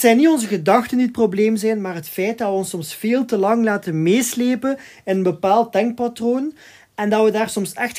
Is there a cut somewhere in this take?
no; 0 cuts

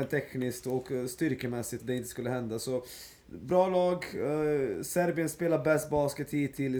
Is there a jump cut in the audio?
yes; 1 cut; at 1.8 s

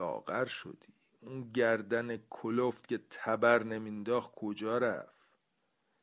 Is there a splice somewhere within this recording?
no; 0 cuts

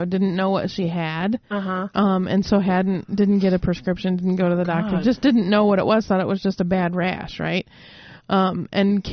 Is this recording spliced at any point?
no; 0 cuts

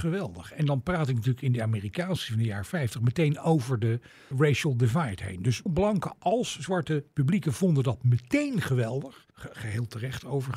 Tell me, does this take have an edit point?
yes; 5 cuts; at 2.3 s, 4.3 s, 5.7 s, 7.1 s, 9.3 s

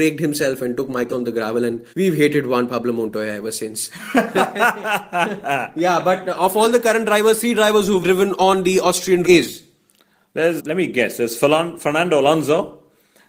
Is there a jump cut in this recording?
yes; 5 cuts; at 1.1 s, 1.9 s, 8.0 s, 9.2 s, 10.6 s

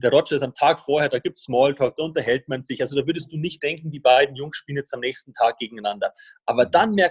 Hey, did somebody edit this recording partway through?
no; 0 cuts

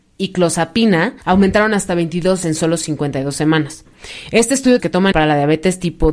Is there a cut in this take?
yes; 4 cuts; at 1.2 s, 2.4 s, 4.8 s, 5.1 s

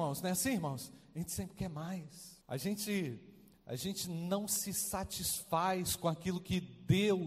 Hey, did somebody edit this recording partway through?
yes; 1 cut; at 2.4 s

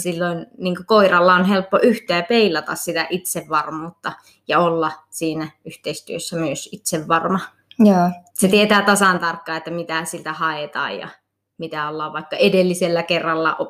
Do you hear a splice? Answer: yes; 1 cut; at 8.3 s

